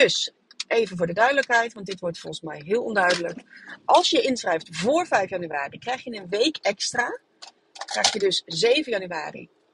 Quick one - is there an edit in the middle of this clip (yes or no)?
no